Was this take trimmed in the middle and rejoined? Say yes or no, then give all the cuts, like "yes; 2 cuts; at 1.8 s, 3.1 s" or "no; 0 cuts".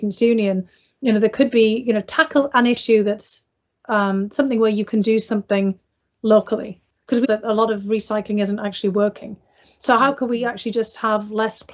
yes; 1 cut; at 7.2 s